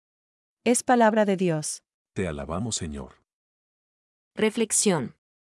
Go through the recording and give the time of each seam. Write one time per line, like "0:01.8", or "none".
0:02.0
0:03.9